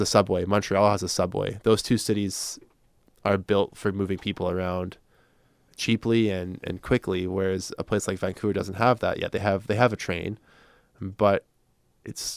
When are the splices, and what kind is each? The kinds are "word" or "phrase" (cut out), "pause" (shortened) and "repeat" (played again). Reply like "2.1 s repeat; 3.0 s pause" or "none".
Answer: none